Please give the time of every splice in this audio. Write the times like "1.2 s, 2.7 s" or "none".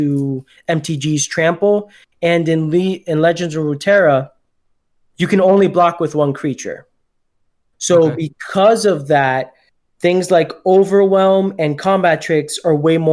none